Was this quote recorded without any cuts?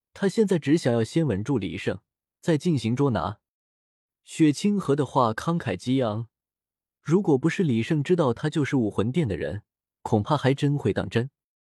yes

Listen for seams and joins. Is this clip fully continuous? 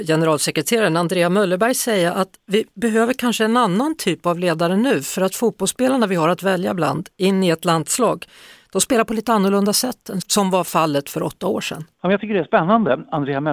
yes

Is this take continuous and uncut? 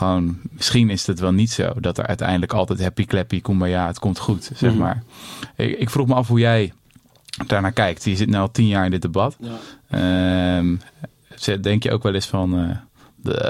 yes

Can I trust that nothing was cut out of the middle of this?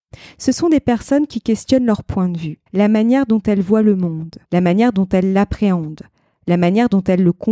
no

